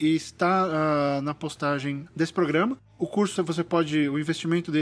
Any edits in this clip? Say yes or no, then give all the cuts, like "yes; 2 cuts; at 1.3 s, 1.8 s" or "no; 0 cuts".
yes; 1 cut; at 3.4 s